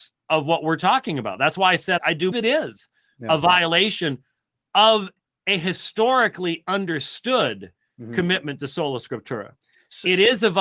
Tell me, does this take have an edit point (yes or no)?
yes